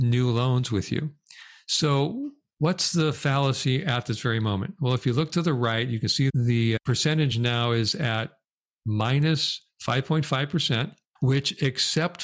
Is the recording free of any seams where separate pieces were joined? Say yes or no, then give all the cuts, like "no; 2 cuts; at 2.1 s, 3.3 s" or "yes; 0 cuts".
yes; 0 cuts